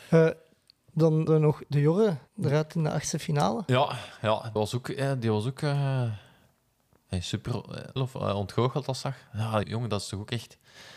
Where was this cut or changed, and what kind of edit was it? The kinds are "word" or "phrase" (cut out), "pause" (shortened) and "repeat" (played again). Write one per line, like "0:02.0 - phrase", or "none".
0:01.3 - word
0:02.3 - pause
0:04.6 - word
0:08.0 - word
0:09.0 - phrase
0:09.6 - word